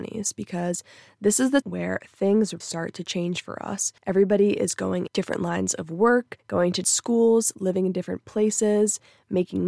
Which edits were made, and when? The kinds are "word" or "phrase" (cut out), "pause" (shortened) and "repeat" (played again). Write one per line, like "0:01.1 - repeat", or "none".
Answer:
0:01.6 - word
0:02.6 - word
0:04.0 - pause
0:05.1 - word
0:06.4 - pause
0:06.8 - word